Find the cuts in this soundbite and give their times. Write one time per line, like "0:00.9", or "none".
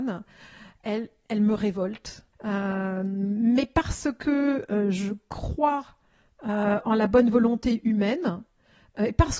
0:02.3